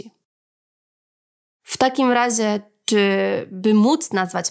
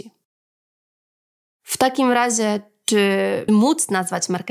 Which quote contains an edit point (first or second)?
second